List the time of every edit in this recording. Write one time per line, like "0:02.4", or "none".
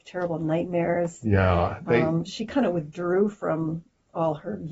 none